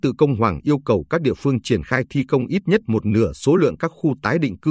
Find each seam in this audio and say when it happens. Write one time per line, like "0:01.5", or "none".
none